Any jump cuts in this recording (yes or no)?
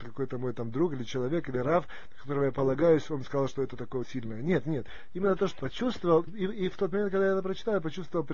yes